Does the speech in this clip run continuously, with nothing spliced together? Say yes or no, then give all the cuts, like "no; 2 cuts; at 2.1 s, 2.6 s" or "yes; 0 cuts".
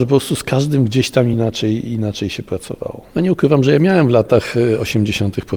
yes; 0 cuts